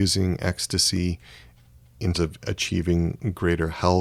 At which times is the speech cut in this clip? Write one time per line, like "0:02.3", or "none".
0:02.1